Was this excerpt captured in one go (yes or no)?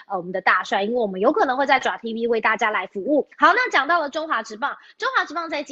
no